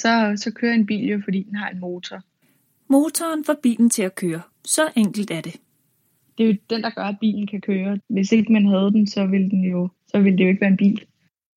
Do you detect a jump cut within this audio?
yes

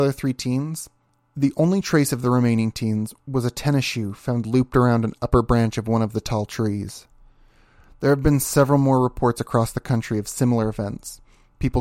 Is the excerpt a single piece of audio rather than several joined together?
yes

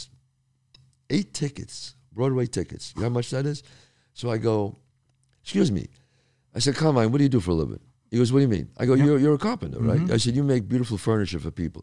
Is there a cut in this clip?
no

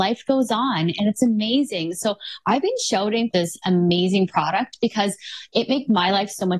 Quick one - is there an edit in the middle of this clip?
yes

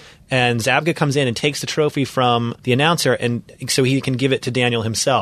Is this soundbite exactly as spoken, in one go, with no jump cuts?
no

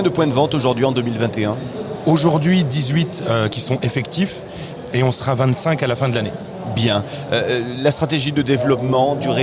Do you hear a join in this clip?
no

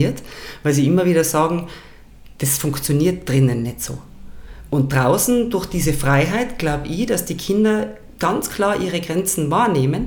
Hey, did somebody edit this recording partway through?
no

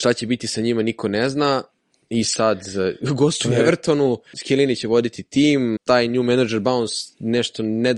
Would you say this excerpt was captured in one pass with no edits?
no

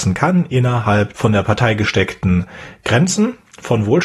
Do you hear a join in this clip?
yes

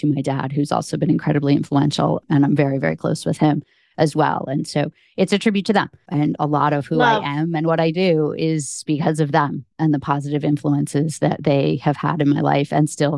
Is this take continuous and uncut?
yes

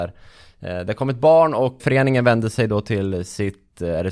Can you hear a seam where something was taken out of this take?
yes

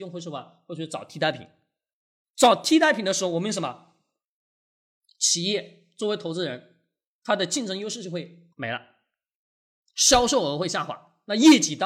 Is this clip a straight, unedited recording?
no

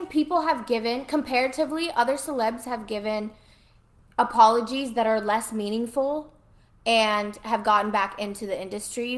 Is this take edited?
no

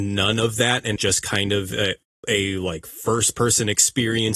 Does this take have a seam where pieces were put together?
yes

